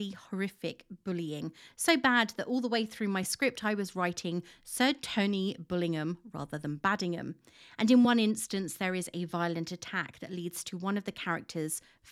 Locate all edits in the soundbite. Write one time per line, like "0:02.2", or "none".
none